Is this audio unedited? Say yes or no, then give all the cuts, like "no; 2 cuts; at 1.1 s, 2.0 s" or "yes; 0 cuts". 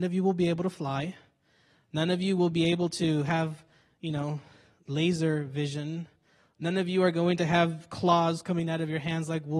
yes; 0 cuts